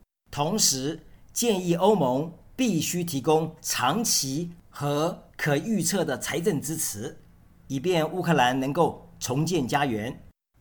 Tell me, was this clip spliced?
no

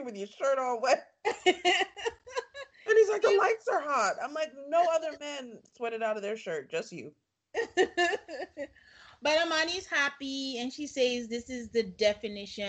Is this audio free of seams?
yes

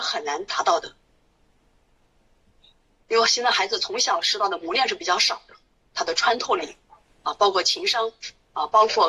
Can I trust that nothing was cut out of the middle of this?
yes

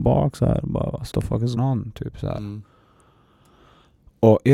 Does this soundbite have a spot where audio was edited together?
yes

